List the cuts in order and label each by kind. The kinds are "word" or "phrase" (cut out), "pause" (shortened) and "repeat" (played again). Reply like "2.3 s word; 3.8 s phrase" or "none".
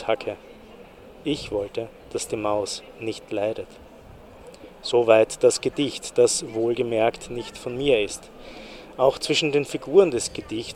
2.0 s pause